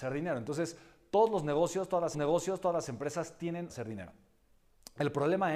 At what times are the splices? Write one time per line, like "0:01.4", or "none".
0:02.1
0:03.7